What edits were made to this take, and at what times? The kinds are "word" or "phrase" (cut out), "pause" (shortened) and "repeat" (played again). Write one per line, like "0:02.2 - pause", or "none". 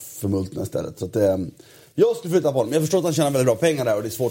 none

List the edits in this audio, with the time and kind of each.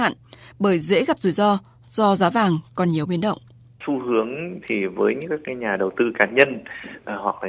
0:03.7 - pause

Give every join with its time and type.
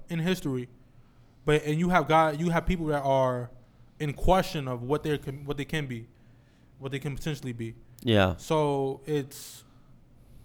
none

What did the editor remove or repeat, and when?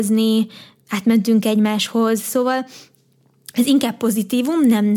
none

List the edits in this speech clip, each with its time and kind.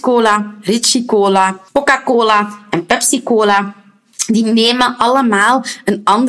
0:01.7 - pause

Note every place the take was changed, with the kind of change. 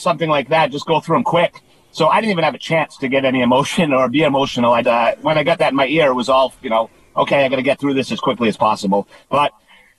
0:04.8 - word

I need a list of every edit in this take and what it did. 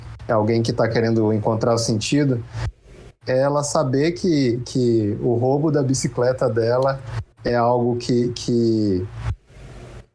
0:07.3 - pause

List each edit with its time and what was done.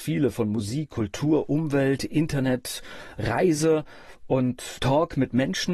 0:04.8 - word

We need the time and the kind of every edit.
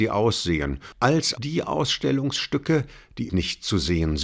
0:01.3 - word
0:03.3 - word

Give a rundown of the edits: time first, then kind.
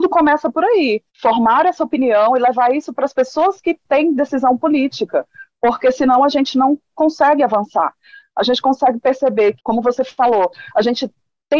none

